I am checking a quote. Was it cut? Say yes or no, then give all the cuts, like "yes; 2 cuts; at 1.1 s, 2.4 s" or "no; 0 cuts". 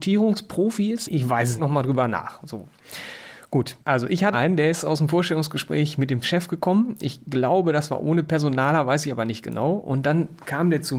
yes; 5 cuts; at 1.1 s, 1.6 s, 3.8 s, 4.3 s, 6.2 s